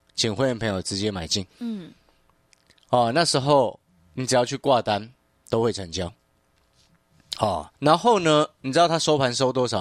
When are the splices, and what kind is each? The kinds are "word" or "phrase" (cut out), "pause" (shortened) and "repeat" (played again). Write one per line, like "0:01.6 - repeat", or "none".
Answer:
0:01.5 - pause
0:07.7 - pause